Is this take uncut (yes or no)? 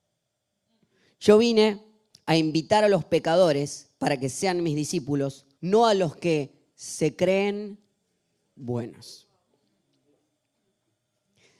no